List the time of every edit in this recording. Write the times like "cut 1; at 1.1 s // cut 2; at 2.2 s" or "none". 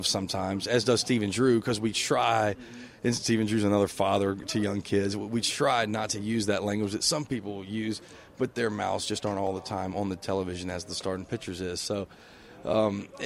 none